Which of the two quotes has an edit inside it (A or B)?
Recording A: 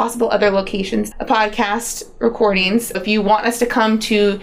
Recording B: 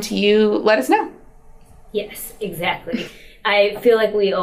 A